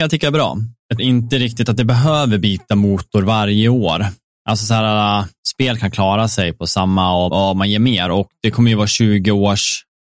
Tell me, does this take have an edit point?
yes; 2 cuts; at 1.0 s, 7.3 s

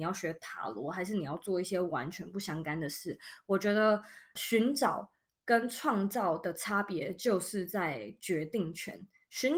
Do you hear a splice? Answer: yes; 1 cut; at 4.4 s

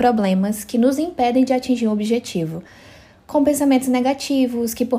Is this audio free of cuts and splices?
yes; 0 cuts

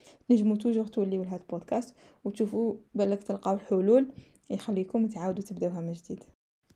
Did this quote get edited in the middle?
no; 0 cuts

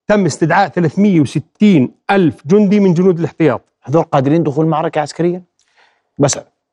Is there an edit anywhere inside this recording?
no; 0 cuts

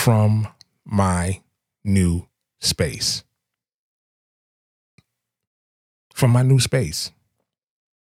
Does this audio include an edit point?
no; 0 cuts

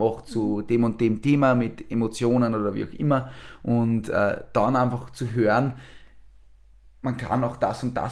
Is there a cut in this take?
no; 0 cuts

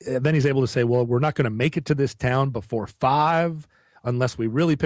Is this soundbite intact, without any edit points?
yes; 0 cuts

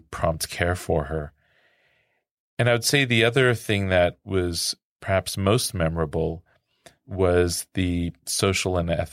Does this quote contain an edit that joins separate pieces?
no; 0 cuts

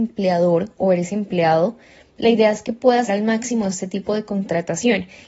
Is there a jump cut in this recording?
yes; 1 cut; at 3.1 s

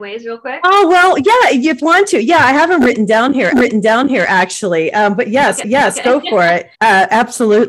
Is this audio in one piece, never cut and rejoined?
no; 4 cuts; at 1.8 s, 3.5 s, 5.6 s, 6.7 s

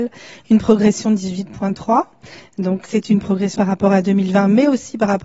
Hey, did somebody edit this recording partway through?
yes; 2 cuts; at 2.8 s, 3.5 s

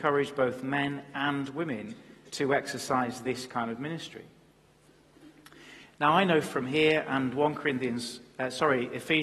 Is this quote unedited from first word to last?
yes; 0 cuts

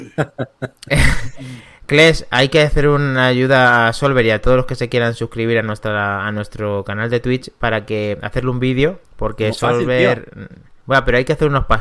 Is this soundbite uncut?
no; 2 cuts; at 9.0 s, 10.8 s

